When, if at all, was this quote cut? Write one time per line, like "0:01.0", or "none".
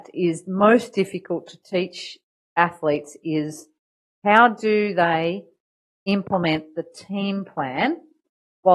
none

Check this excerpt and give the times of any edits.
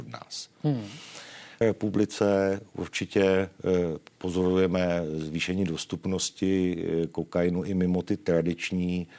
0:01.6

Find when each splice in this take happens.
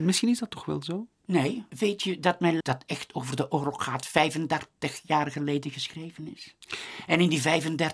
0:01.7
0:02.6

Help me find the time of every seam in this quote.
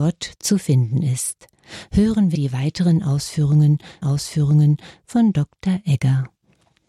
0:02.3
0:04.0

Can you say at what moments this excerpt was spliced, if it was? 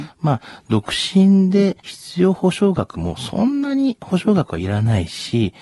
0:01.8

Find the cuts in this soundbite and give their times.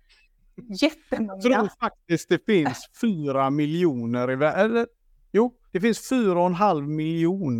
0:05.7

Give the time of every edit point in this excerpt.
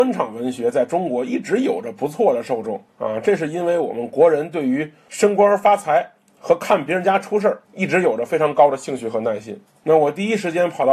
0:02.9
0:07.6

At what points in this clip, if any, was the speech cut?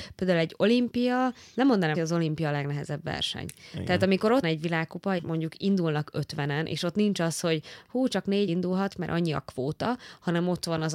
0:01.9
0:04.4
0:05.2
0:08.5

